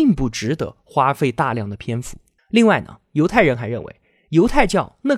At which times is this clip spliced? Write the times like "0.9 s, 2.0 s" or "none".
2.4 s